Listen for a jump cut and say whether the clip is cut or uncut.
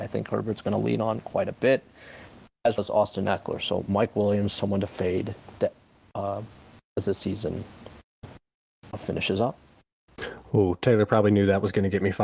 cut